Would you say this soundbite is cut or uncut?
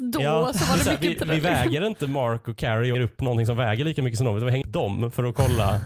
cut